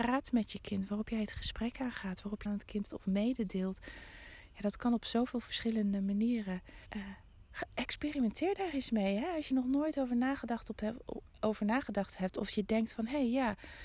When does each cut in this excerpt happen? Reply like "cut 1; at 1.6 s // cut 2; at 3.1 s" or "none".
cut 1; at 2.5 s // cut 2; at 2.9 s // cut 3; at 6.9 s // cut 4; at 9.5 s // cut 5; at 11.3 s